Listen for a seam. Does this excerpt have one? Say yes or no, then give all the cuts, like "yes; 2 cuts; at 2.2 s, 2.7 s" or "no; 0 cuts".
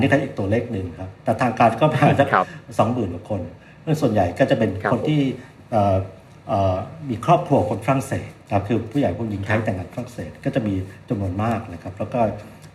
yes; 1 cut; at 8.4 s